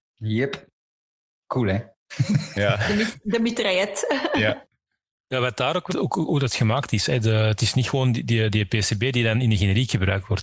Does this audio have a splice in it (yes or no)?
yes